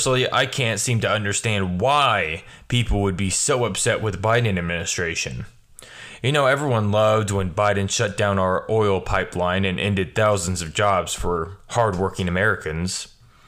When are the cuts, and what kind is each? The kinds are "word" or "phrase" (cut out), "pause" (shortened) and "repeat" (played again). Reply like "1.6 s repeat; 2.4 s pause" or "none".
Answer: none

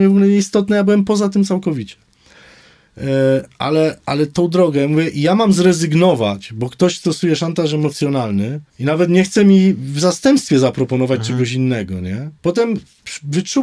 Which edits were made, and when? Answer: 8.7 s pause; 12.4 s pause

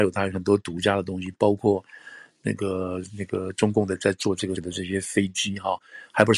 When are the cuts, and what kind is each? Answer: 4.6 s word

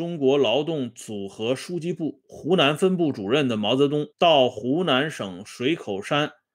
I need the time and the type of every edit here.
4.1 s pause

